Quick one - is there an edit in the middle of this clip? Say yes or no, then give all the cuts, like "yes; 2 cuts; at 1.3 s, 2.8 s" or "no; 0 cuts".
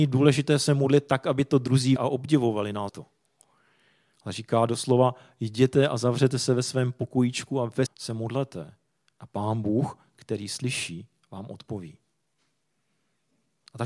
yes; 3 cuts; at 2.0 s, 2.9 s, 7.9 s